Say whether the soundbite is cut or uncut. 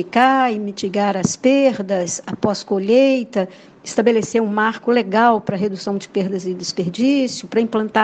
uncut